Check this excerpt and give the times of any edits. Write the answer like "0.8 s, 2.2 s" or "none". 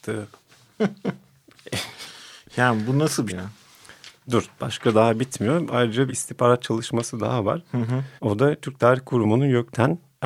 3.3 s, 6.1 s, 8.2 s

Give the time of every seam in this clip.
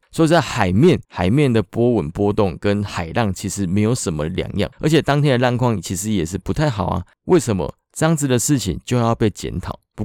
1.0 s, 4.7 s

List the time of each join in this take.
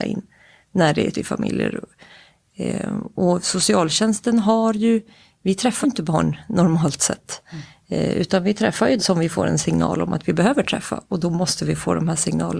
1.1 s, 5.8 s, 9.0 s

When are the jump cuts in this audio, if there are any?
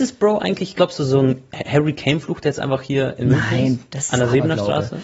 none

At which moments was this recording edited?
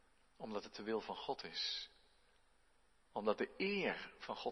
none

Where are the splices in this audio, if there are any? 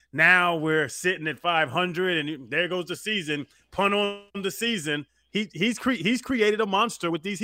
4.3 s

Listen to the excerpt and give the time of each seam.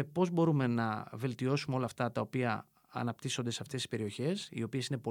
none

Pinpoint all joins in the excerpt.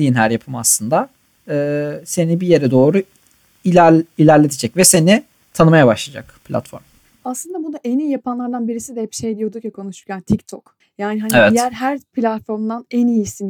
6.4 s, 10.8 s

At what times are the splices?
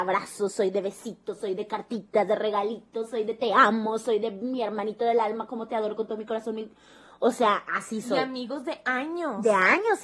none

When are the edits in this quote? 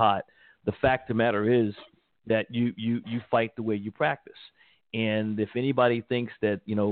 none

